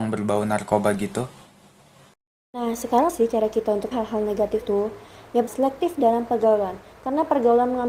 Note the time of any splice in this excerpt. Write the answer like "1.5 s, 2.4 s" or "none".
3.1 s, 3.9 s, 4.6 s, 5.5 s